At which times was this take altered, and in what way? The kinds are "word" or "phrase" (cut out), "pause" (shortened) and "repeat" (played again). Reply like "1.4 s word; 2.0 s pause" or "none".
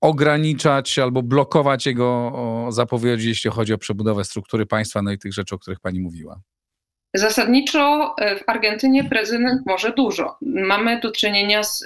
none